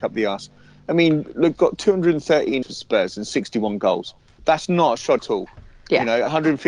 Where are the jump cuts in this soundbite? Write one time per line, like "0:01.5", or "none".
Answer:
0:01.5
0:02.6
0:05.2

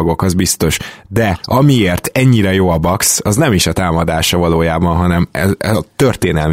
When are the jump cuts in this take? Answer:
none

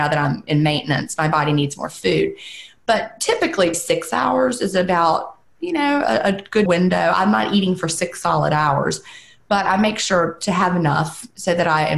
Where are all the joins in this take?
0:03.7
0:06.7

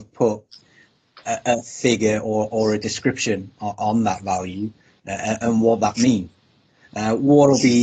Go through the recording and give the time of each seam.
none

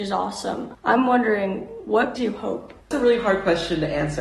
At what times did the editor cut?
0:02.2
0:02.8

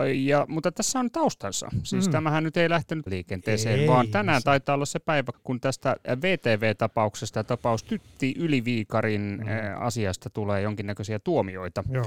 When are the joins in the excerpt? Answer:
0:03.1
0:05.3

